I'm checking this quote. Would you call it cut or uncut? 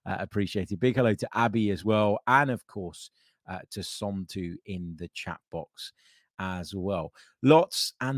uncut